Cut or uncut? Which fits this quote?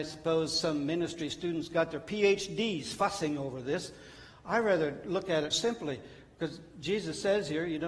cut